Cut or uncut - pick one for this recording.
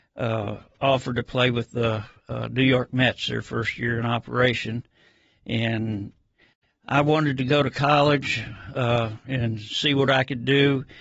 uncut